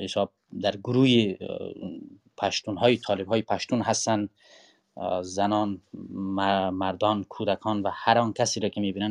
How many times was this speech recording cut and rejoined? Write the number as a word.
zero